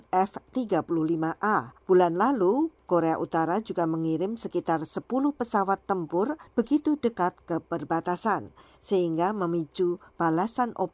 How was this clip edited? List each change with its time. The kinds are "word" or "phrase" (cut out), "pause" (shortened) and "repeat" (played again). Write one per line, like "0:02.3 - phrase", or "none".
0:01.8 - pause
0:06.5 - pause